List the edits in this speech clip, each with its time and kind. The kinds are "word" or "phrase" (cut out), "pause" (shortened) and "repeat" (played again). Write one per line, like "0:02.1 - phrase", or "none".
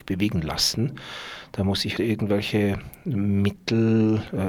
0:02.0 - word

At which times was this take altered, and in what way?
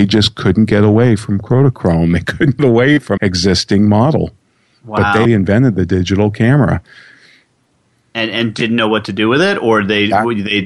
0:02.6 - word
0:03.2 - word
0:05.3 - word

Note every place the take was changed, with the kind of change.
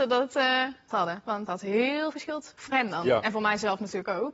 0:00.9 - word
0:01.5 - word
0:02.1 - word
0:02.7 - word

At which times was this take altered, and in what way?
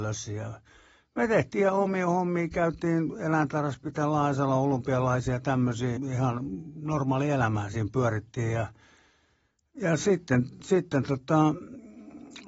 0:06.0 - word

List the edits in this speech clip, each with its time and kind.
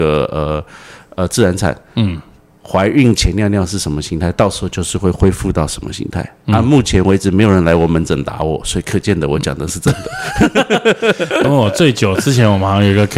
0:11.4 - word

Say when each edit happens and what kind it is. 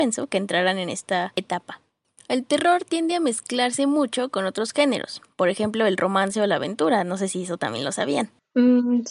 none

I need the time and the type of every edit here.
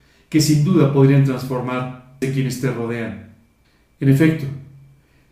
0:02.2 - phrase
0:03.6 - pause

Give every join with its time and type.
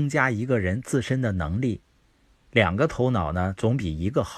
none

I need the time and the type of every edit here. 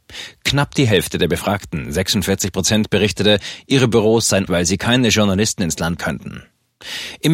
0:04.5 - word
0:06.0 - word

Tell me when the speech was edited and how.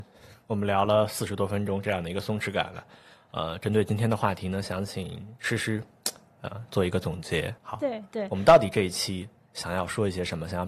0:07.6 - pause

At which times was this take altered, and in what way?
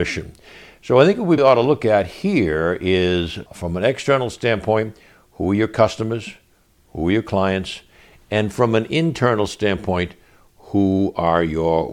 0:01.4 - word
0:03.5 - word

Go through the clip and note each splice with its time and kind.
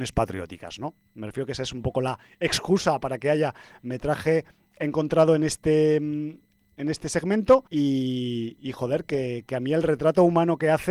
0:07.7 - pause

